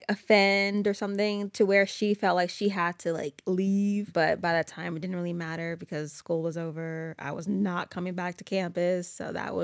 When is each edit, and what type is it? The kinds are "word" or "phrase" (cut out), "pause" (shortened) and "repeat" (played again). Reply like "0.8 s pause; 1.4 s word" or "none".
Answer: none